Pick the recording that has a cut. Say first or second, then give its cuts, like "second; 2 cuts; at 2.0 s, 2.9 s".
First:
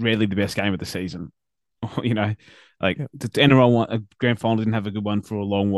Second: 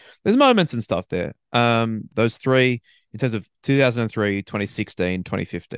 second; 2 cuts; at 2.1 s, 3.5 s